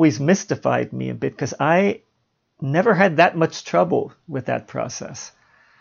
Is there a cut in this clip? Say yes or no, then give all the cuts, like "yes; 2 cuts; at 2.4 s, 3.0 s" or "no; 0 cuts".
no; 0 cuts